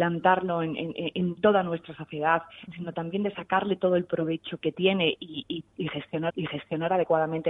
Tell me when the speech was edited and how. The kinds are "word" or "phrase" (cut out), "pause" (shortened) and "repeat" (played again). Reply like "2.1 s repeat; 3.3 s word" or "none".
4.6 s word; 6.3 s repeat